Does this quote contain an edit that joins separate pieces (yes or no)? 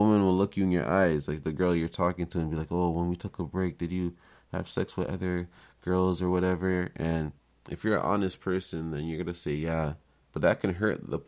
no